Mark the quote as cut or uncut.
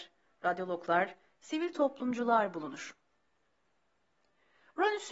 uncut